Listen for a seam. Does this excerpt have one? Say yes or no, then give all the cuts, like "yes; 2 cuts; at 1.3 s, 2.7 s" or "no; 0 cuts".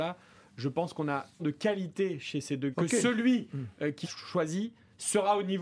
yes; 3 cuts; at 1.4 s, 2.7 s, 4.0 s